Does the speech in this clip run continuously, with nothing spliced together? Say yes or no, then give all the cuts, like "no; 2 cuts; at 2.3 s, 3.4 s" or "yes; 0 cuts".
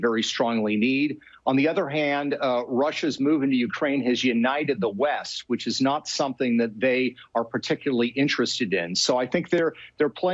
yes; 0 cuts